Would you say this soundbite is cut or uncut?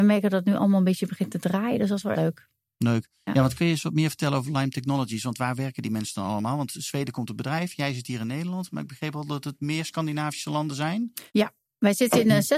cut